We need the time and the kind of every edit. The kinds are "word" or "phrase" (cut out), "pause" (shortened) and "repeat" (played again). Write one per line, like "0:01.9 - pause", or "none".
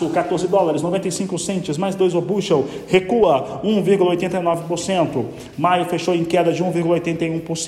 none

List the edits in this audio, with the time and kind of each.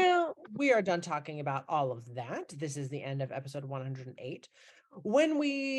none

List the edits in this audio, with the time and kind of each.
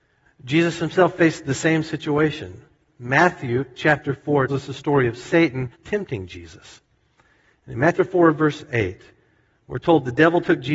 0:04.5 - word
0:05.7 - pause
0:08.0 - word

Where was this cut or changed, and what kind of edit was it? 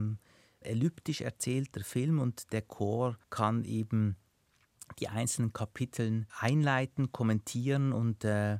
0:03.2 - pause
0:06.3 - pause

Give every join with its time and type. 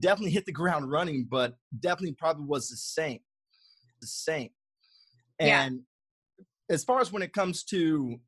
0:04.0 - repeat

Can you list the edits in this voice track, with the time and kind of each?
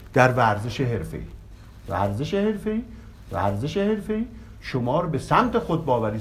0:03.1 - repeat

